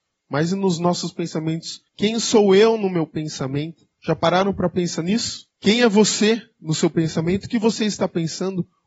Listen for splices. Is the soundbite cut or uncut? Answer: cut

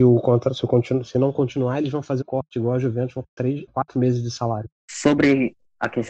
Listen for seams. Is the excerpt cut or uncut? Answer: cut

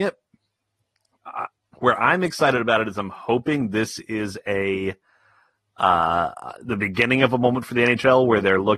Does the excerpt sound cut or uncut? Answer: uncut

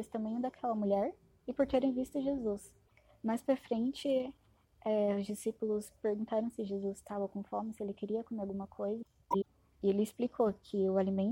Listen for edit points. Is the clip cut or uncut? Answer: uncut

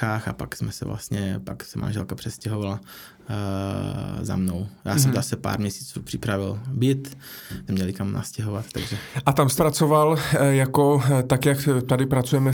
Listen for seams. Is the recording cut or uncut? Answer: cut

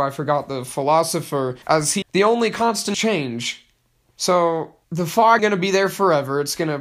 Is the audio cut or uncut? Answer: cut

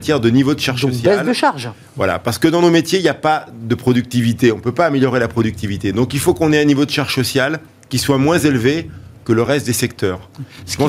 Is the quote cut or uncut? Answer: uncut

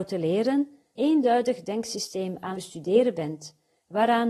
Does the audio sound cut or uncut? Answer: cut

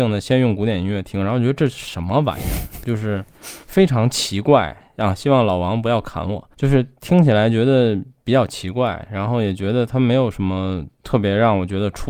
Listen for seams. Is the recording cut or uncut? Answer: cut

